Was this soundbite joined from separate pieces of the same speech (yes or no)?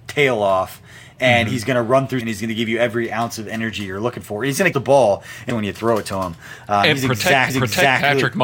yes